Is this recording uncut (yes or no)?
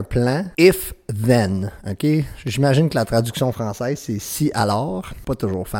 yes